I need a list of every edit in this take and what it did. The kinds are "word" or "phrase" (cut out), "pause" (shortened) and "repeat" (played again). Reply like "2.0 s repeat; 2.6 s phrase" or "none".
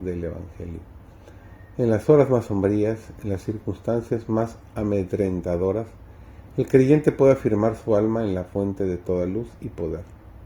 none